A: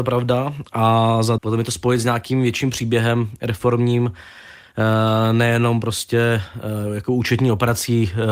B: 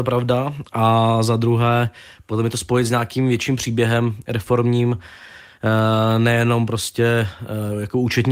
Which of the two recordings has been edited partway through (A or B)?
A